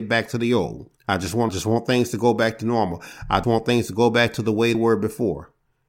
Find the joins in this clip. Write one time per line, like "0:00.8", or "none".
0:01.0
0:01.5
0:03.4
0:04.7

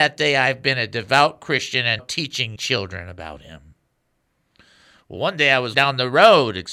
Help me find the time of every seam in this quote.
0:02.0
0:02.6
0:05.7

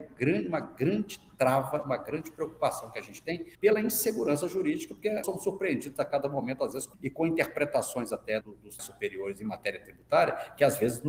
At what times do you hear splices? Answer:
0:03.5
0:05.2
0:06.9
0:08.4
0:08.8

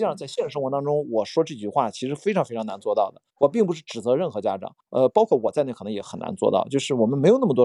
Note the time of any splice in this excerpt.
0:03.3
0:04.8

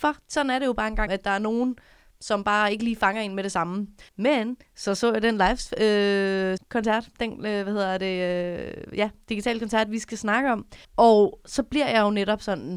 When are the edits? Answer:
0:01.1
0:04.1
0:06.6
0:10.8

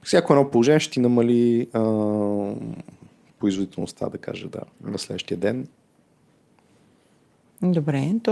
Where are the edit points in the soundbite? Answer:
0:04.7

